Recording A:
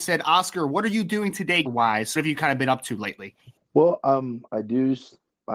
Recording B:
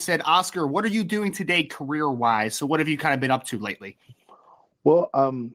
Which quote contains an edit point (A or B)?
A